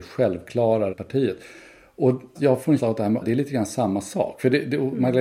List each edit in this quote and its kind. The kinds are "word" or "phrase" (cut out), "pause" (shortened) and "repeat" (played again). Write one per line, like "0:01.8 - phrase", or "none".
0:00.9 - word
0:02.4 - word
0:02.8 - word
0:03.2 - word